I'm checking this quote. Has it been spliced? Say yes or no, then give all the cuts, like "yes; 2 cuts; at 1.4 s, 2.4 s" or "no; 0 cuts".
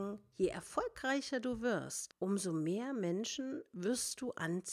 no; 0 cuts